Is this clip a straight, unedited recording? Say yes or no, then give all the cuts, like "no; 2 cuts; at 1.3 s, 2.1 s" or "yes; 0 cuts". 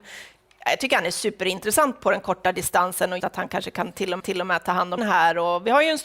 no; 3 cuts; at 3.2 s, 4.2 s, 5.0 s